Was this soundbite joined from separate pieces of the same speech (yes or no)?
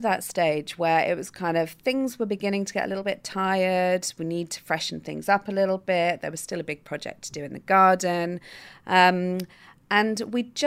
no